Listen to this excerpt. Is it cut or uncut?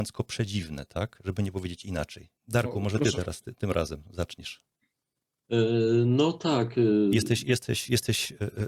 cut